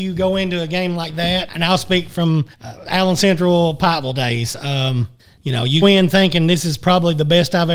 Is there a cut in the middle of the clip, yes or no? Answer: yes